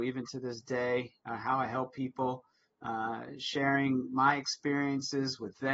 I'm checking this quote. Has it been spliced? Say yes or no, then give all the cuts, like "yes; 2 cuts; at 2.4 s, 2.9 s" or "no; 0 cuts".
no; 0 cuts